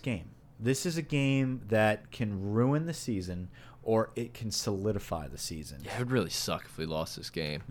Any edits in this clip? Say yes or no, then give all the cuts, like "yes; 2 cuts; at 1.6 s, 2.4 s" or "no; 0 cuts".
no; 0 cuts